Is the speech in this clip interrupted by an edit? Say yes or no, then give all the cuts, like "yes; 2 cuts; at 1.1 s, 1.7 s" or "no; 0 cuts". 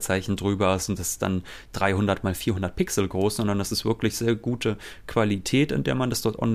no; 0 cuts